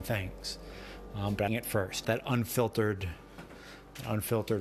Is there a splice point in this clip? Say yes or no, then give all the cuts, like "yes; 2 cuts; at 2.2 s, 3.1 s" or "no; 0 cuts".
yes; 2 cuts; at 1.5 s, 2.0 s